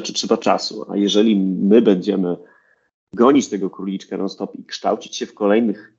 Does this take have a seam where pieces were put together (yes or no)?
no